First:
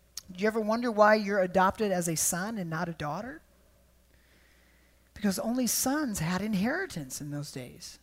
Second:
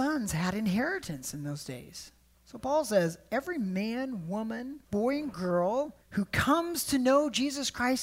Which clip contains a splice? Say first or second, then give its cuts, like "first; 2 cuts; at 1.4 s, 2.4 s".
second; 3 cuts; at 2.3 s, 4.8 s, 6.0 s